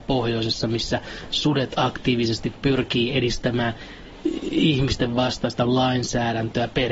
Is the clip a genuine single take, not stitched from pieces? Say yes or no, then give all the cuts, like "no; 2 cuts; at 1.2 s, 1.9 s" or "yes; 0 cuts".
yes; 0 cuts